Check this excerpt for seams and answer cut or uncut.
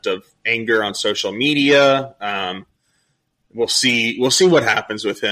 uncut